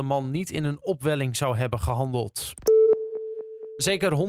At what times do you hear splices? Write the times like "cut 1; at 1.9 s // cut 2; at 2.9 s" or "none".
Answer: none